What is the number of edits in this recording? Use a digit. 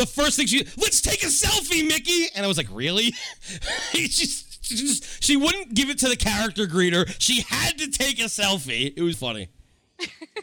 1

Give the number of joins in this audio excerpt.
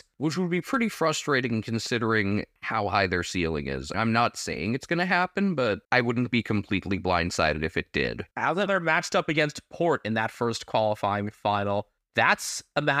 4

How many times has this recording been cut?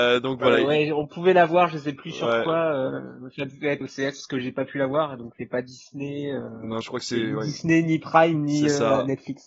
2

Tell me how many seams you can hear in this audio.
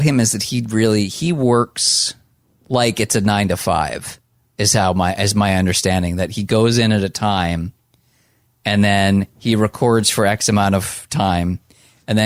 0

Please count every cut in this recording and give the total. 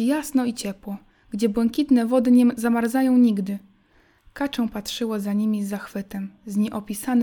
0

